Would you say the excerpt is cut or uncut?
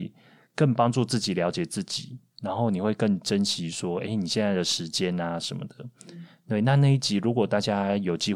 uncut